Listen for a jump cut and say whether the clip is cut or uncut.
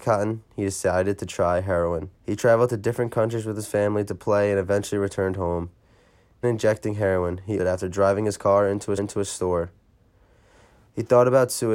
cut